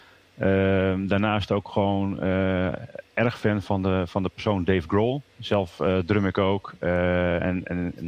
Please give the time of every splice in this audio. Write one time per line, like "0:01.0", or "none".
0:05.3